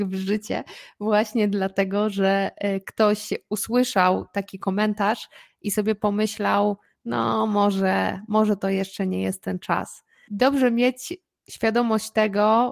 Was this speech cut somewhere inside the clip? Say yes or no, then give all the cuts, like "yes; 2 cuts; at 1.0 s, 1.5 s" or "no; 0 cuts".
no; 0 cuts